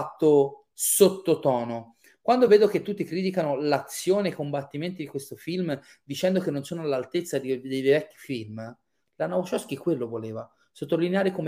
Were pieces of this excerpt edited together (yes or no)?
no